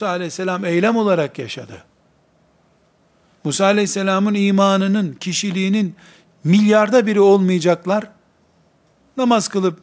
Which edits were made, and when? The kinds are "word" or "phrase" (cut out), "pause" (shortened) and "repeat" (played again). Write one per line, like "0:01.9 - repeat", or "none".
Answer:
none